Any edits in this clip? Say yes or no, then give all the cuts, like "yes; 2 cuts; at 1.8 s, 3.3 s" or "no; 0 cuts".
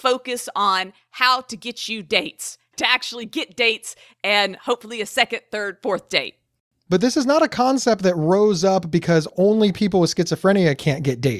no; 0 cuts